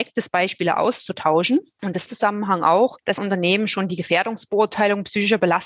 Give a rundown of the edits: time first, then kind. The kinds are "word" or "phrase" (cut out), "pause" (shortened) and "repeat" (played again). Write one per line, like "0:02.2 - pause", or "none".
0:02.1 - phrase
0:03.2 - phrase

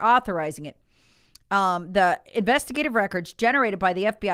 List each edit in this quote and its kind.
none

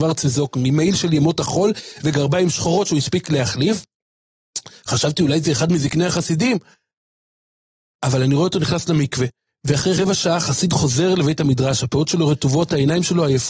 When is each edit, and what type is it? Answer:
none

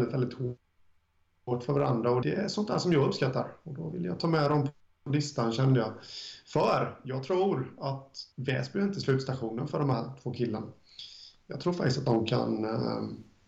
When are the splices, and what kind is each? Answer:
0:02.2 - word
0:08.3 - pause

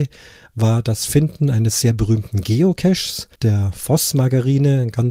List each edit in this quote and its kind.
0:03.3 - pause

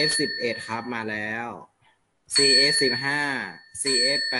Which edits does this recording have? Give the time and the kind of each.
none

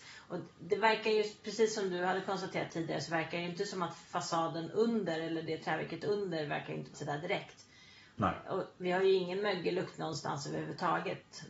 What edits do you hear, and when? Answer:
0:06.9 - word

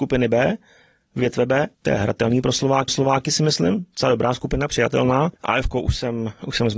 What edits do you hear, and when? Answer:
0:01.7 - pause
0:02.9 - repeat
0:05.4 - pause

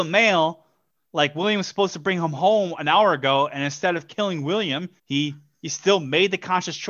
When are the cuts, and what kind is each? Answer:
0:05.0 - pause

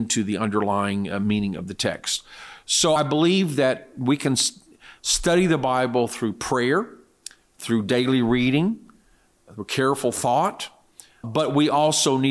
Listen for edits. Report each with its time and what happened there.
0:03.0 - word
0:11.2 - word

